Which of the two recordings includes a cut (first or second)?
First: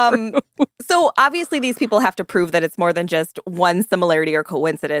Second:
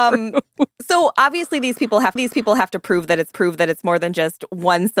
second